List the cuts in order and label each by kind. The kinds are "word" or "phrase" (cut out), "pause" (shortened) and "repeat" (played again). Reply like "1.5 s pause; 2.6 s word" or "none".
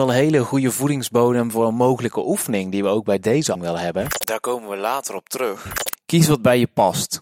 3.5 s word